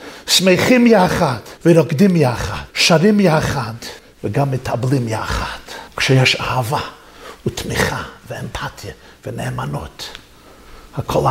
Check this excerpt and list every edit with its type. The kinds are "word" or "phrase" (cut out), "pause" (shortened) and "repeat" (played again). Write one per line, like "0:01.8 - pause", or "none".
0:01.6 - pause
0:02.7 - pause
0:04.0 - pause
0:05.9 - pause